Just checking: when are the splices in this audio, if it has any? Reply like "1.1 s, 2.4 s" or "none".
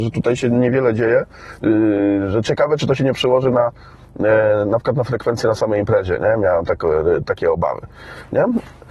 none